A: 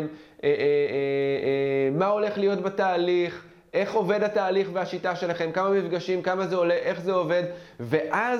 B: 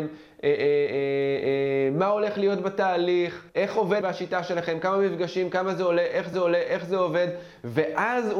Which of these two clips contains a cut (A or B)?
B